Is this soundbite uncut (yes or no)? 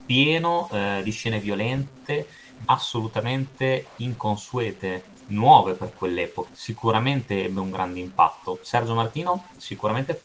no